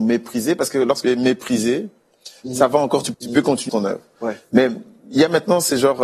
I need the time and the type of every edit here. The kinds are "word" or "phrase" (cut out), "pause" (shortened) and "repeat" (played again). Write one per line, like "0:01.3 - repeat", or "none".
0:01.0 - word
0:03.1 - word
0:03.7 - word